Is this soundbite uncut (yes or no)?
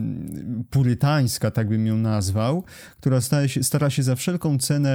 yes